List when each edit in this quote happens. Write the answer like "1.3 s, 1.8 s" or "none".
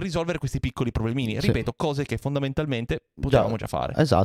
none